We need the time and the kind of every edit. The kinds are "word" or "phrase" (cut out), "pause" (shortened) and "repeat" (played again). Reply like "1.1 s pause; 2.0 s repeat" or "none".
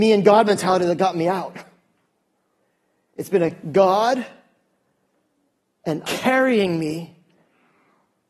6.0 s word